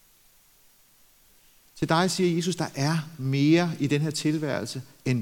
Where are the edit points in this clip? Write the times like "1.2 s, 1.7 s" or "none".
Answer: none

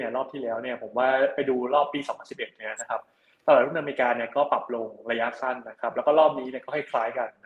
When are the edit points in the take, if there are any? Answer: none

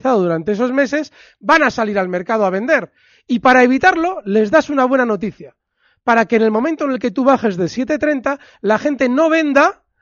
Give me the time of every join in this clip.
none

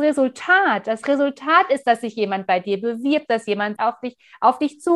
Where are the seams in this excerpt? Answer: 3.8 s

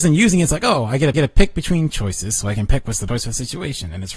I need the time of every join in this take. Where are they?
1.1 s, 1.9 s, 3.1 s

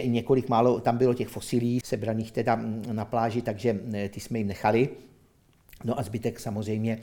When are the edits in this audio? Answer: 1.8 s

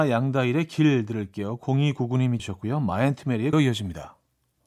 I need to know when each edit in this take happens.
2.4 s, 3.5 s

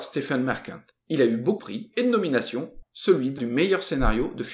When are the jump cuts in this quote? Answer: 1.6 s, 2.8 s, 3.4 s

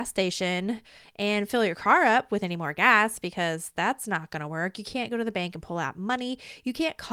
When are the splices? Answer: none

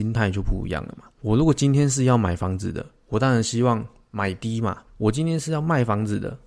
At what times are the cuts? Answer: 1.1 s, 4.9 s

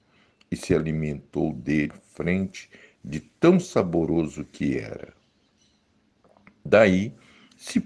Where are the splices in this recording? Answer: 1.9 s

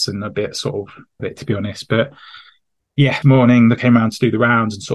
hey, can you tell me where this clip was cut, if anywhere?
1.2 s, 3.2 s, 3.8 s

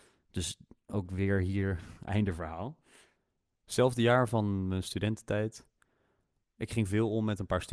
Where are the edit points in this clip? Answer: none

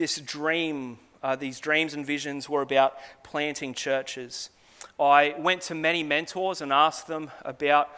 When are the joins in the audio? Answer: none

